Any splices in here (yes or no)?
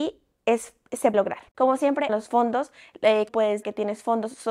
yes